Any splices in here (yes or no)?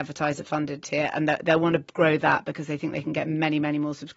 no